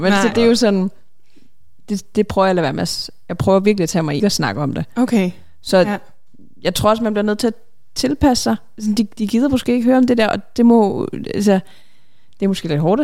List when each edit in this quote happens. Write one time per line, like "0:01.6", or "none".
0:04.2